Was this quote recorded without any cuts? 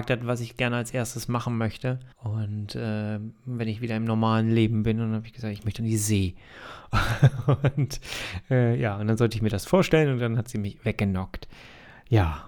no; 1 cut; at 2.1 s

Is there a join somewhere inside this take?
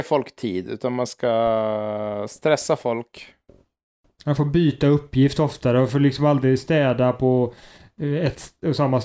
no; 0 cuts

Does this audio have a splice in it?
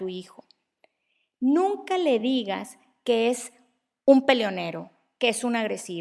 no; 0 cuts

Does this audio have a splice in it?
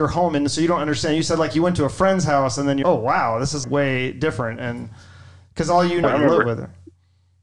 yes; 3 cuts; at 2.8 s, 3.6 s, 6.0 s

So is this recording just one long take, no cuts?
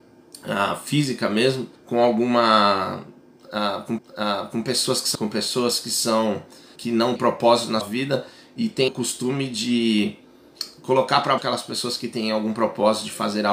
no; 8 cuts; at 1.8 s, 4.0 s, 5.1 s, 6.8 s, 7.2 s, 7.8 s, 8.9 s, 11.4 s

